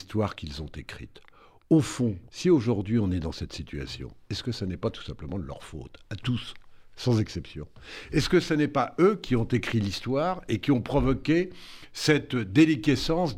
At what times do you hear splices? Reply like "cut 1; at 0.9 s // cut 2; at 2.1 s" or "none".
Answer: cut 1; at 2.3 s